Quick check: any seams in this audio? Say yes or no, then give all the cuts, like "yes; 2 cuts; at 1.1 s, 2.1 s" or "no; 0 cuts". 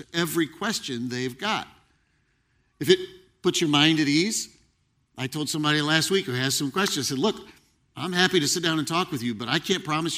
no; 0 cuts